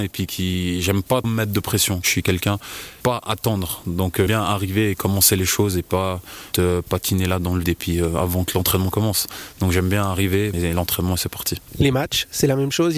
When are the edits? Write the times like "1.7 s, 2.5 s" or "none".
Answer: 1.2 s, 3.0 s, 4.3 s, 6.5 s, 7.6 s, 10.5 s